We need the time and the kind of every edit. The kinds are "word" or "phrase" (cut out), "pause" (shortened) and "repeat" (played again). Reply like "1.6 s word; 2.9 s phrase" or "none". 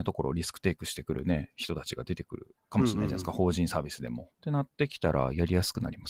4.3 s pause